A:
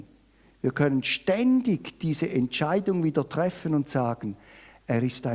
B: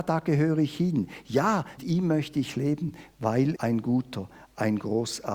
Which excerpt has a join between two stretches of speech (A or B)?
B